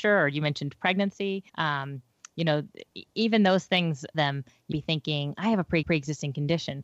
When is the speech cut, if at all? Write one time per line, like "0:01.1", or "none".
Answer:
0:01.5
0:03.1
0:04.1
0:04.7
0:05.8